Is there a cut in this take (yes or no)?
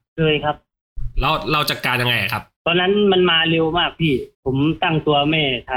yes